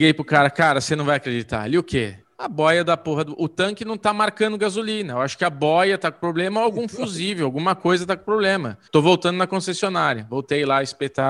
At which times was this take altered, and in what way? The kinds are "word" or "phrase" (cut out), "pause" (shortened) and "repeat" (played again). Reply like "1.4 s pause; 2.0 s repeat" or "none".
2.2 s pause; 8.9 s pause